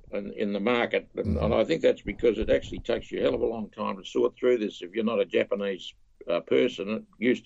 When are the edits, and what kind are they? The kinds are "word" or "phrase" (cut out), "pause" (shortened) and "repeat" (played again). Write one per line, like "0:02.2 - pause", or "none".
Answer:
none